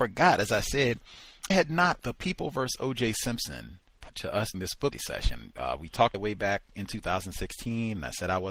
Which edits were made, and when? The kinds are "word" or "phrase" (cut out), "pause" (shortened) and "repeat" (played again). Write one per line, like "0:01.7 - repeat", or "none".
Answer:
0:01.5 - word
0:02.0 - word
0:04.1 - word
0:04.5 - word
0:04.9 - word
0:06.1 - word